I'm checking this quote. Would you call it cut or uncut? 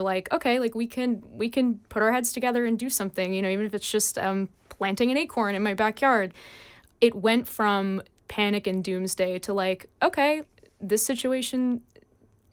uncut